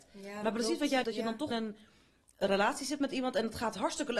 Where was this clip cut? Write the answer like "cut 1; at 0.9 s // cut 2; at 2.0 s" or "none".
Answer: cut 1; at 1.0 s // cut 2; at 1.5 s

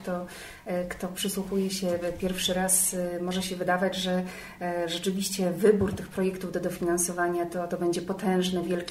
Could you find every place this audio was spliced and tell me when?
none

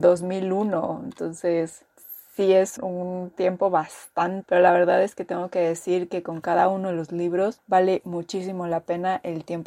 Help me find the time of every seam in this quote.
cut 1; at 2.8 s // cut 2; at 4.4 s

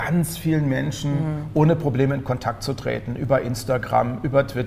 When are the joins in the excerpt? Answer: none

